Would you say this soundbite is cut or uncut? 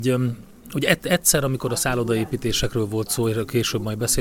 uncut